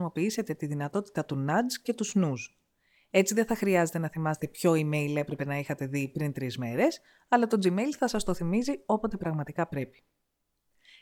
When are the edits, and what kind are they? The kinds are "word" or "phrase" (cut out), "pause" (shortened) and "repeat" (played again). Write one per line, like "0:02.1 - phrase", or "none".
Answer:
none

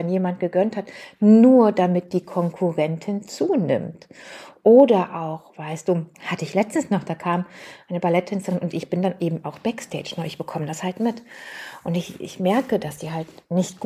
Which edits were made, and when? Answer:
0:06.1 - pause

